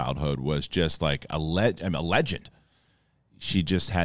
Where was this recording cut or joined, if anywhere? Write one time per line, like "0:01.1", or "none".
none

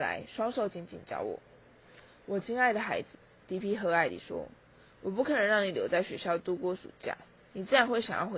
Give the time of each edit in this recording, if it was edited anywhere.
0:03.1

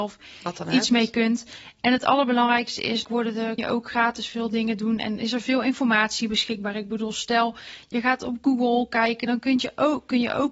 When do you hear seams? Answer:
0:03.0
0:03.6

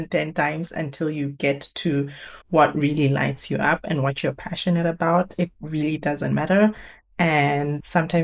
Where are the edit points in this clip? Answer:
0:02.4

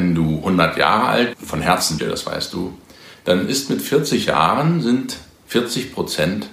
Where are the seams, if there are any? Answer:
0:01.3
0:02.0

